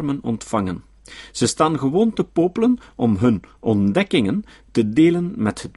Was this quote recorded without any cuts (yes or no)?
yes